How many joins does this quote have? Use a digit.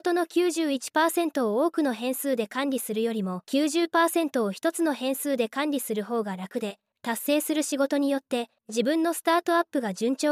3